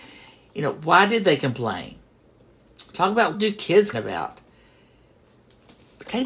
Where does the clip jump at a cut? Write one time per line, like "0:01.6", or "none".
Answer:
0:03.3
0:03.9